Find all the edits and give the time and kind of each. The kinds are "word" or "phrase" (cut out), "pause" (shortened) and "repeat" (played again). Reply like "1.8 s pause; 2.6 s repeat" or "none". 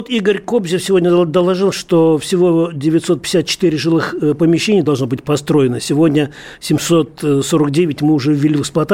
none